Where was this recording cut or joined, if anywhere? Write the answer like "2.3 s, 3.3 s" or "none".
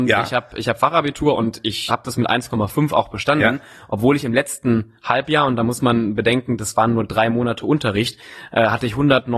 1.9 s